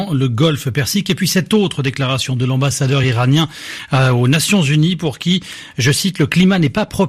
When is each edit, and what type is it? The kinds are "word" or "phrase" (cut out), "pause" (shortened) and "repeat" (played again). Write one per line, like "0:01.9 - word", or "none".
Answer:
none